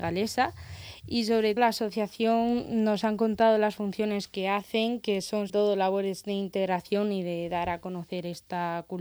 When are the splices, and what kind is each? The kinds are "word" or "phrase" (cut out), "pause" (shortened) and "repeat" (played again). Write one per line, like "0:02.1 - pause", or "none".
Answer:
0:01.6 - word
0:05.5 - word